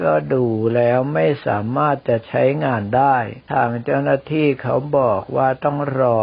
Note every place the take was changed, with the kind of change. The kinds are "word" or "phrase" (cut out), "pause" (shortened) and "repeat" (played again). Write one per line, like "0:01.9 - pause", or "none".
0:03.4 - pause